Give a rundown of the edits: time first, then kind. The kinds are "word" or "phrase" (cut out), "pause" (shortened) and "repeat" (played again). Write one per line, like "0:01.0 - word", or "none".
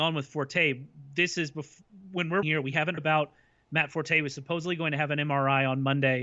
0:02.4 - word
0:03.0 - word